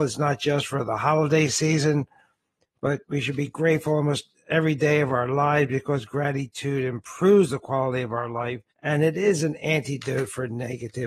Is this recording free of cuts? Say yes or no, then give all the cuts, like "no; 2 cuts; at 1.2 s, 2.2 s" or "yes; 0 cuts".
no; 2 cuts; at 3.0 s, 8.7 s